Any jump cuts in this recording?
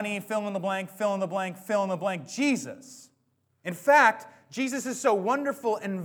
no; 0 cuts

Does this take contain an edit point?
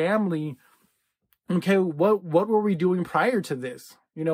no; 0 cuts

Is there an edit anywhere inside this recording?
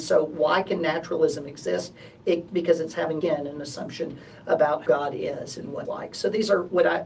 yes; 4 cuts; at 2.5 s, 3.2 s, 4.9 s, 5.8 s

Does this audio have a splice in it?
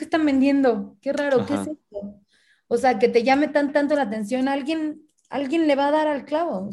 yes; 1 cut; at 3.7 s

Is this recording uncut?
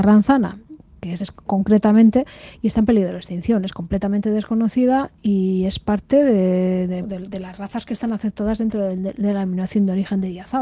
no; 2 cuts; at 1.2 s, 7.0 s

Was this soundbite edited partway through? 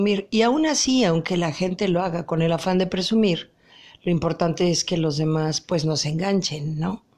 no; 0 cuts

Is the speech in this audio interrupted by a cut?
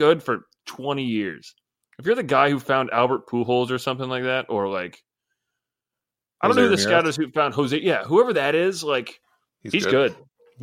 no; 0 cuts

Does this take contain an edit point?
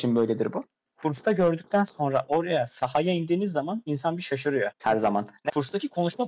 yes; 1 cut; at 4.7 s

